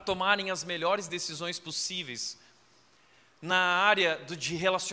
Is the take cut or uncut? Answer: uncut